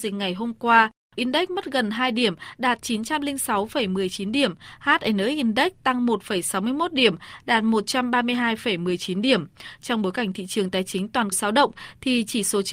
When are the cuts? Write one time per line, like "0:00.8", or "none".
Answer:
0:01.2
0:11.3